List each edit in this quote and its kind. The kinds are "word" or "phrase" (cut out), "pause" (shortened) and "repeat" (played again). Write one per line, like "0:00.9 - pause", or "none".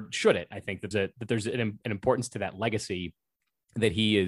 0:00.9 - word